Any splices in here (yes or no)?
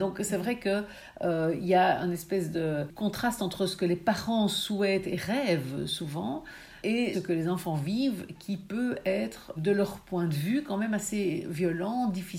yes